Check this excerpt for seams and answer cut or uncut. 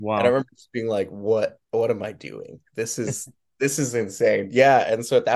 cut